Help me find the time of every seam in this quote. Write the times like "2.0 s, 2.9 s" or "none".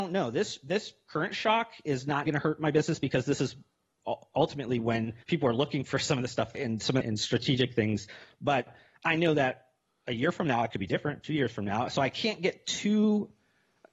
2.3 s, 5.2 s, 6.5 s, 7.0 s